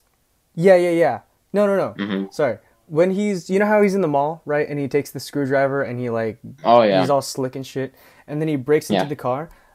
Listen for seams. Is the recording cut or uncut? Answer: uncut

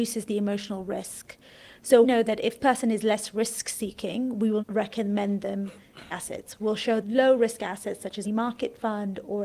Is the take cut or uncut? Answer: cut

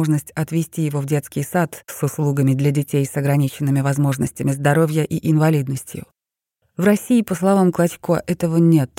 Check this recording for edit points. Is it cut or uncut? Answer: uncut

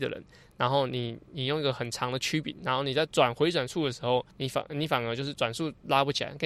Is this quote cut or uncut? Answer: cut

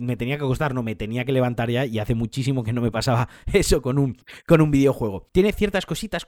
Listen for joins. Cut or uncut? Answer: cut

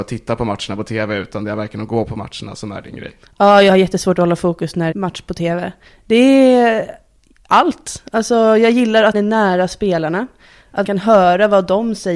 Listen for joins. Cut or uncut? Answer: cut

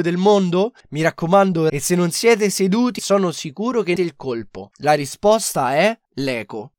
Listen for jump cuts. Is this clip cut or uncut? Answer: cut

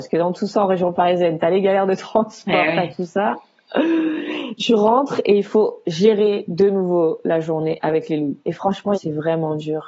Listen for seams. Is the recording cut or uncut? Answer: cut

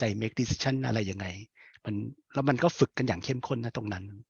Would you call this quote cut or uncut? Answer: uncut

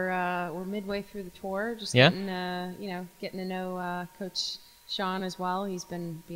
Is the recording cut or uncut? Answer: uncut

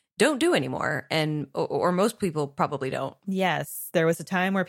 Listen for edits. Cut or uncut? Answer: uncut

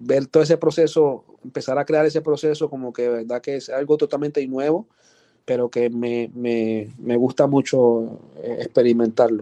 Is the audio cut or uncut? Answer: cut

